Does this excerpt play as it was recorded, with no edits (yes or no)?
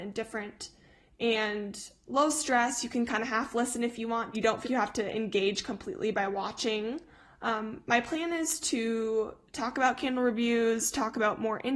no